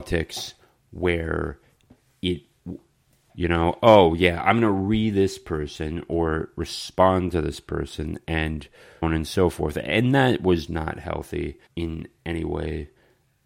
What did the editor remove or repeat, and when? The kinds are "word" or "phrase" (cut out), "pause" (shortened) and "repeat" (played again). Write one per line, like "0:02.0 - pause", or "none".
0:03.3 - word
0:09.0 - word
0:10.7 - word
0:11.7 - pause